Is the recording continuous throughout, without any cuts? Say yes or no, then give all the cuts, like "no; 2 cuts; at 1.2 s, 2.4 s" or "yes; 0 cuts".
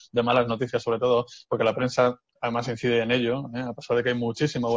yes; 0 cuts